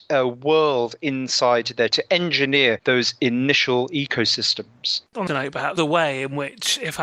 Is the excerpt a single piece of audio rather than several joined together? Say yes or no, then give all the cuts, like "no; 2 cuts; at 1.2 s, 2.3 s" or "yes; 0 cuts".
no; 3 cuts; at 1.9 s, 5.3 s, 5.8 s